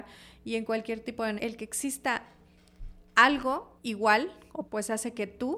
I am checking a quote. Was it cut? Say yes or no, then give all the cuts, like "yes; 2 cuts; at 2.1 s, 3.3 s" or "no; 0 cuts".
yes; 3 cuts; at 1.4 s, 3.8 s, 4.7 s